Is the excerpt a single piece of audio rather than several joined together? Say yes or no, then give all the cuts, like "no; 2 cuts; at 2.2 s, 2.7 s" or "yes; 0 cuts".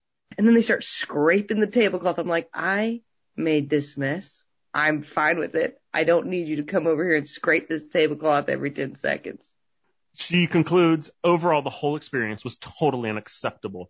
yes; 0 cuts